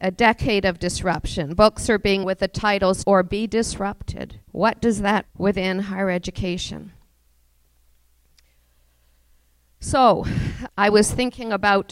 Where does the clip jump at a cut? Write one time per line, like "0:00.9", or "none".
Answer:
0:02.2
0:03.0
0:04.4
0:05.2
0:10.7